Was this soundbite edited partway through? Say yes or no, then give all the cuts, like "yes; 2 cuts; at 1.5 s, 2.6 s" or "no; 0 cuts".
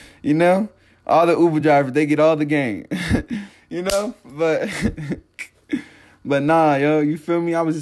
no; 0 cuts